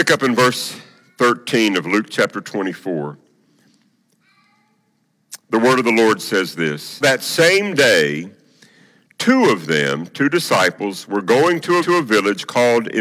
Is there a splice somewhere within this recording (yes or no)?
yes